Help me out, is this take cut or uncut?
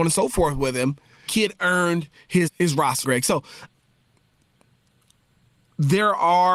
cut